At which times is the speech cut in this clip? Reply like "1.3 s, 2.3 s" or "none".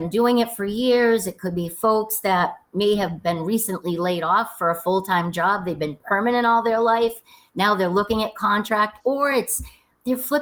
none